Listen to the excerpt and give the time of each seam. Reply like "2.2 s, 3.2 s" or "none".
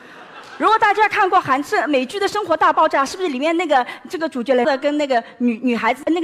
4.6 s